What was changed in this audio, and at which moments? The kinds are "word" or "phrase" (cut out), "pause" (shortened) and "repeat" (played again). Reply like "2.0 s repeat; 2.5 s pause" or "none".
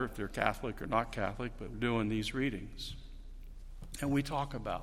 1.7 s word